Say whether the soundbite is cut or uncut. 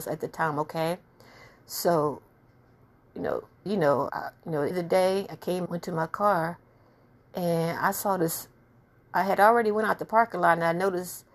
cut